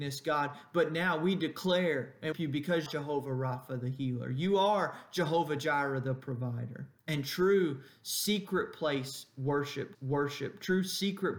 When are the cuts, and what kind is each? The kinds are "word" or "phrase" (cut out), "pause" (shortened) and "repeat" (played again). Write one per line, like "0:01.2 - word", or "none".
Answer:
0:02.3 - phrase
0:02.9 - phrase
0:07.0 - pause
0:09.9 - repeat